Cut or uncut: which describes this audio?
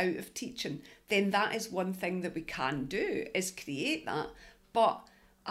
uncut